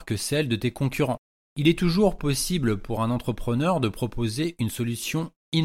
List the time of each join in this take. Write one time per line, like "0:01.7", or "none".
none

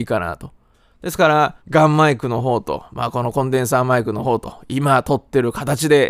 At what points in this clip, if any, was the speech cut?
0:01.6

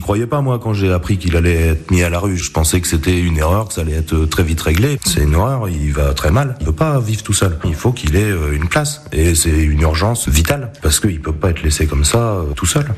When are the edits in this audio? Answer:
0:10.3

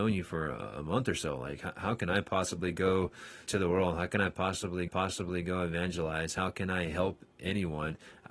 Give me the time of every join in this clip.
0:03.5
0:04.9

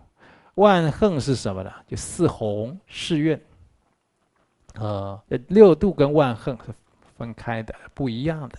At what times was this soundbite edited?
0:02.8
0:05.2

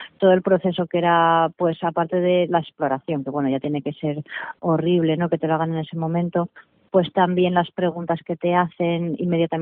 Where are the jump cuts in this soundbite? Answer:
none

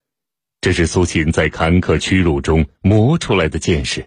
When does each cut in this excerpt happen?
0:02.8

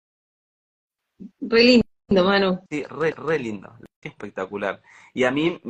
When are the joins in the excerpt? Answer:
0:01.3
0:02.7
0:03.1
0:04.0

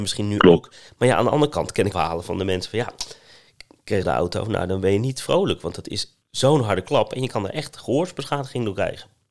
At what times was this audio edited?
0:01.9
0:04.0
0:06.2

